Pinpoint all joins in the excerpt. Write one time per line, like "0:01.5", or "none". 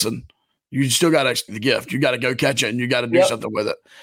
0:01.5